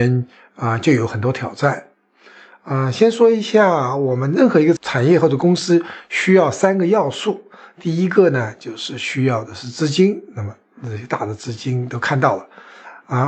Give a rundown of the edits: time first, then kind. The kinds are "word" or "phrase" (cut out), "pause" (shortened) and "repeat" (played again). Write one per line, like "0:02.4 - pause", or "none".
none